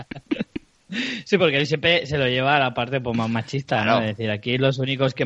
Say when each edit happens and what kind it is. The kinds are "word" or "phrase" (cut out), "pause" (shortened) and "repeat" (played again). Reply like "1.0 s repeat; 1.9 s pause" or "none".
none

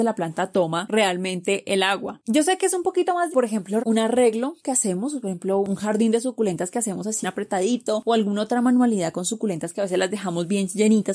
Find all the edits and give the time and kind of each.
3.3 s word; 3.8 s word; 7.2 s word

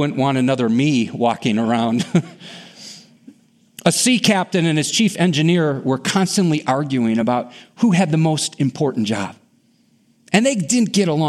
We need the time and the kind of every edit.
none

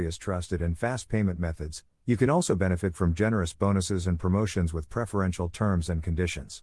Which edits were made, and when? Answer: none

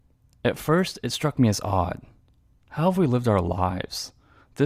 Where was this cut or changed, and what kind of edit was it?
none

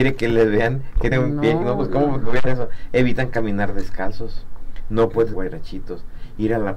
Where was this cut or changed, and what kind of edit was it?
1.1 s word; 1.6 s word; 2.5 s word; 5.3 s word

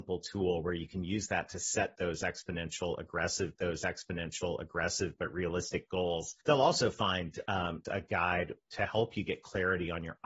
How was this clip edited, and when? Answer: 3.6 s repeat; 6.4 s pause; 7.8 s word

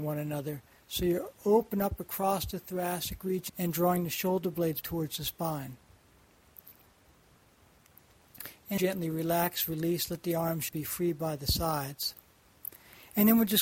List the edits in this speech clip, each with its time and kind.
1.3 s pause; 3.5 s phrase; 4.8 s word; 8.8 s word; 10.7 s word

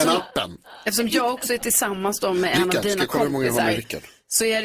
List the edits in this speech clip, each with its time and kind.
none

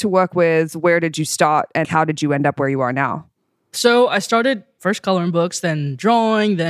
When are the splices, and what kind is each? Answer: 1.8 s word

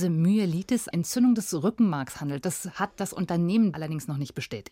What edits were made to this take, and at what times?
0.9 s word; 3.7 s word

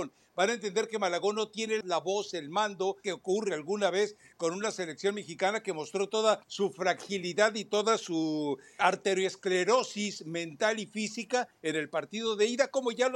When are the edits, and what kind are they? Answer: 1.8 s word; 3.0 s phrase; 6.4 s pause; 8.8 s word

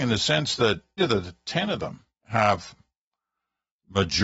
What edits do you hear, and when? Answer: 1.0 s word; 2.2 s pause

